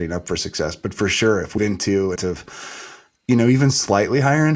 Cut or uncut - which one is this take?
cut